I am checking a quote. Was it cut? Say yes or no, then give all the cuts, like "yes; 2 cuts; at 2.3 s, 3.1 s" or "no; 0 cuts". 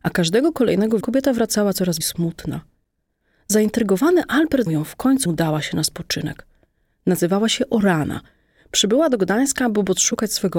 yes; 4 cuts; at 1.0 s, 2.0 s, 4.7 s, 5.3 s